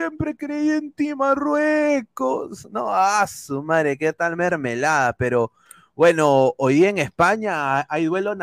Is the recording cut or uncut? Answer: uncut